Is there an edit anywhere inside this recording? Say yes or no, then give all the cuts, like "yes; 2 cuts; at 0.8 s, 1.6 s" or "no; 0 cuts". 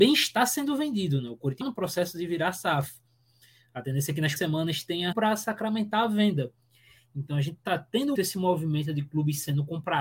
yes; 4 cuts; at 1.6 s, 4.4 s, 5.1 s, 8.1 s